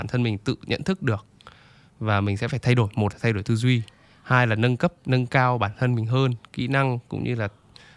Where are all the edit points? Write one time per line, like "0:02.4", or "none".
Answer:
0:05.0